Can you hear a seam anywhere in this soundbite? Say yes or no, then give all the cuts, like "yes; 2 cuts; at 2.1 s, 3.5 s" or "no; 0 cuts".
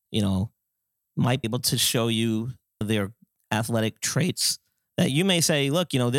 yes; 2 cuts; at 1.4 s, 2.8 s